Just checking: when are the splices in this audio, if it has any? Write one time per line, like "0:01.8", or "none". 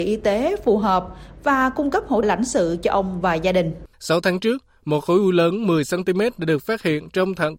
0:02.2
0:03.9